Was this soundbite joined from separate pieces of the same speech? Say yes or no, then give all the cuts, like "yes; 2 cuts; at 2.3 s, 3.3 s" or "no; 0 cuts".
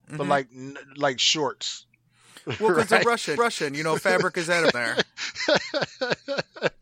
yes; 2 cuts; at 3.4 s, 4.7 s